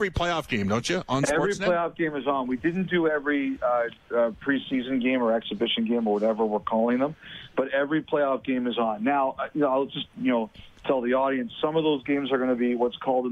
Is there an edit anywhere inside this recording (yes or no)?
no